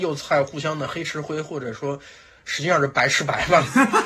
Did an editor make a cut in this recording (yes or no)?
no